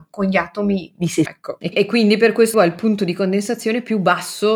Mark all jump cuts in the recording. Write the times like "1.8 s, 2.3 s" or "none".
0.9 s, 1.3 s, 1.7 s, 2.5 s

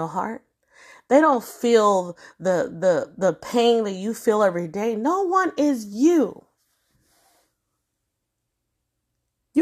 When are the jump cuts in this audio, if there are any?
none

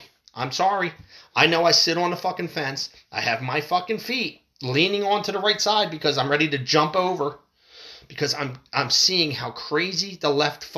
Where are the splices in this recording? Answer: none

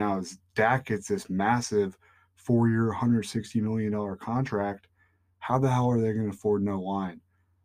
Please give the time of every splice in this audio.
none

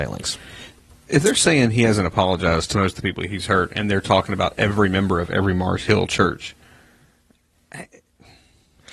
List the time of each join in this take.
none

